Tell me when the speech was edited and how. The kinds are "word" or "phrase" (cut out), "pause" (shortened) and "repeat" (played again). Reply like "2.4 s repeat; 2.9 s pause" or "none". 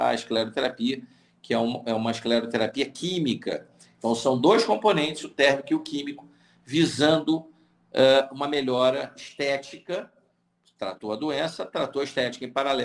none